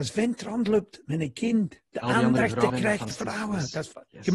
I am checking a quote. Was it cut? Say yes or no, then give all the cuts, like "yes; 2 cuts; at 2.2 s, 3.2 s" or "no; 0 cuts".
yes; 3 cuts; at 1.9 s, 2.7 s, 3.1 s